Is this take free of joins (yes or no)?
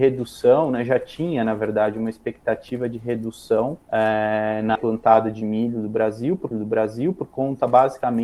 no